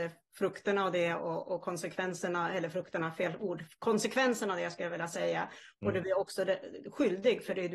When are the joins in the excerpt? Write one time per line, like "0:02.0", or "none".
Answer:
none